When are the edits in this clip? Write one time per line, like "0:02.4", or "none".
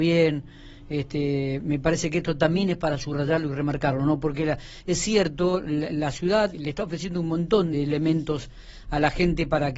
0:05.9
0:06.5
0:07.7